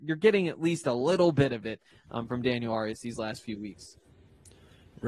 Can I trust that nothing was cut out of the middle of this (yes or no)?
yes